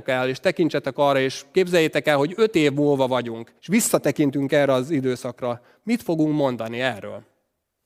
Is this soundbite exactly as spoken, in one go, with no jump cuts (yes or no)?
no